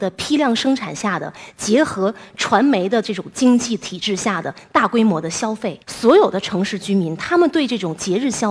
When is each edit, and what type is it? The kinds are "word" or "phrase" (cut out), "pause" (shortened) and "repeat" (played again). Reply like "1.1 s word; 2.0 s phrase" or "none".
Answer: 5.8 s pause

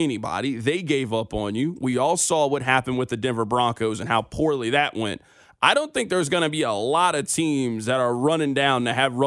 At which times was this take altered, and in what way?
none

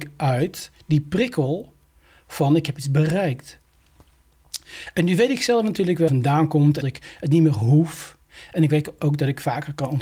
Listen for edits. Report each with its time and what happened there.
6.1 s phrase; 6.8 s phrase

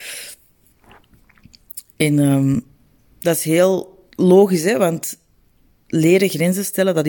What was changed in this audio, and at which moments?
4.1 s pause

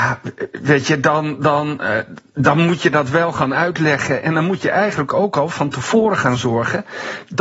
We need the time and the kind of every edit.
none

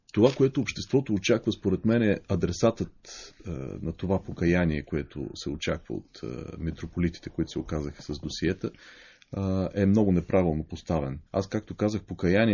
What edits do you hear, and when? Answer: 11.3 s pause

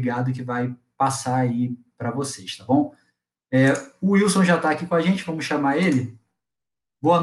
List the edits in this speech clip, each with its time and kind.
none

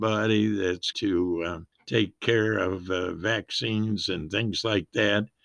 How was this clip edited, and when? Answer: 0.9 s word; 1.7 s pause

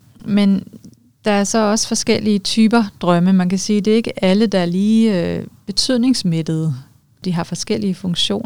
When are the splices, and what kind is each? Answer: none

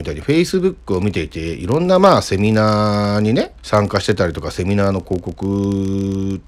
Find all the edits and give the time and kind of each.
3.6 s pause

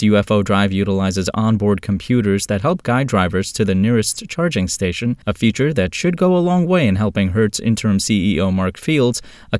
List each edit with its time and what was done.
5.2 s pause

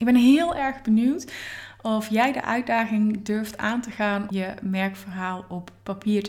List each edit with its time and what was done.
4.3 s word

